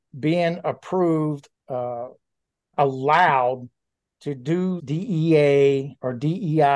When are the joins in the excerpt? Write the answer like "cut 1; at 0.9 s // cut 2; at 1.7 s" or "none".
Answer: cut 1; at 1.6 s // cut 2; at 2.7 s // cut 3; at 4.8 s